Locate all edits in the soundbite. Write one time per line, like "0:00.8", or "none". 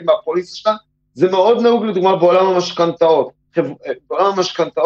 0:03.4